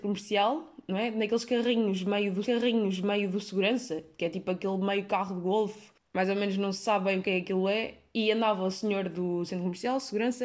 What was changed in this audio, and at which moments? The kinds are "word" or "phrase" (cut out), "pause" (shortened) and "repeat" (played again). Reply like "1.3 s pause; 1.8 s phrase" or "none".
2.4 s repeat